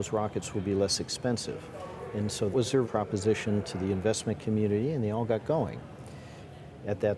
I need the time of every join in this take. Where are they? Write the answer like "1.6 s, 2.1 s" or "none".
2.5 s, 2.8 s